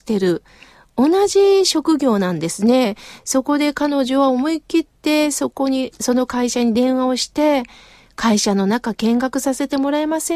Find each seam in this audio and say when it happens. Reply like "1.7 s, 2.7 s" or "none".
none